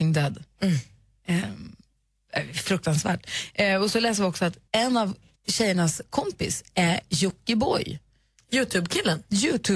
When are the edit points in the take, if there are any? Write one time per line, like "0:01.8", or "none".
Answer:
0:04.7
0:05.3